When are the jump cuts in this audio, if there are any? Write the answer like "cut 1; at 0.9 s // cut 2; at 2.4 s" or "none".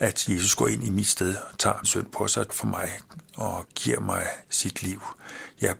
cut 1; at 1.8 s // cut 2; at 2.5 s // cut 3; at 4.4 s